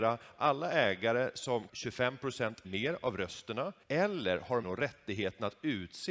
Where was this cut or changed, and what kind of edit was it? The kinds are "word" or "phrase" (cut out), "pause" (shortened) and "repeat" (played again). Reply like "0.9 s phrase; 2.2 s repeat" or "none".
1.7 s word; 2.6 s word; 3.8 s pause; 4.6 s word